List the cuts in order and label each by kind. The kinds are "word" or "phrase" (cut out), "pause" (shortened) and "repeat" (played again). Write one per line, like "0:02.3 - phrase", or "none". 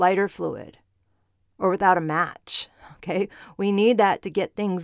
none

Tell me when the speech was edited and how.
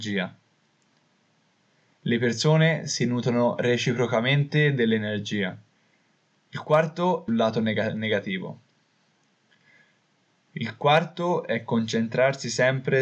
0:05.8 - pause
0:07.3 - phrase

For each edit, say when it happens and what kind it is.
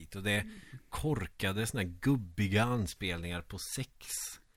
none

